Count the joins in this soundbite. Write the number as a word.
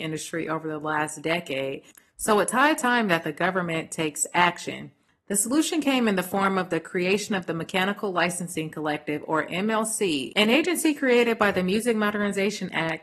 zero